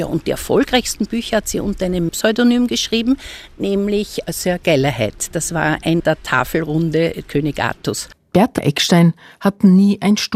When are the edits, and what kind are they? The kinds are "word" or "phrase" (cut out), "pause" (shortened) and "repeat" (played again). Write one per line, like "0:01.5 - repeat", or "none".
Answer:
0:02.1 - word
0:06.0 - word
0:07.2 - word